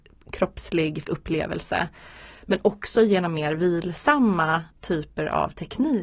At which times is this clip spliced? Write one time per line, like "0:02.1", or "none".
0:01.0
0:04.7